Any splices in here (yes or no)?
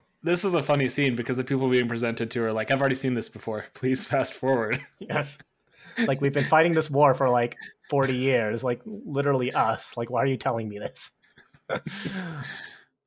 no